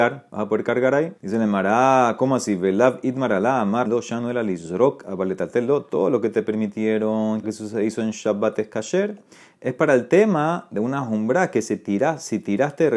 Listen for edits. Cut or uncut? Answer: cut